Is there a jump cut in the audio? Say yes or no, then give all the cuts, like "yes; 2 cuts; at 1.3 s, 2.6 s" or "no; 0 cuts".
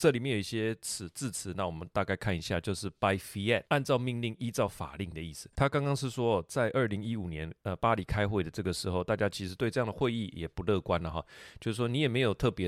yes; 1 cut; at 7.6 s